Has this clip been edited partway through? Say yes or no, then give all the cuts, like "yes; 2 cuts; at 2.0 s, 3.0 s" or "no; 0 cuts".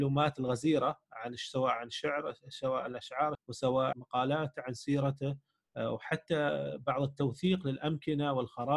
yes; 2 cuts; at 3.3 s, 3.9 s